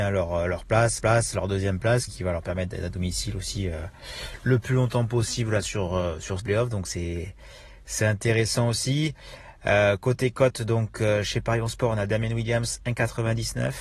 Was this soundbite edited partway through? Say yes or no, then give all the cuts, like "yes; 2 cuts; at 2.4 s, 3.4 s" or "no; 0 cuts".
yes; 3 cuts; at 1.0 s, 2.1 s, 6.4 s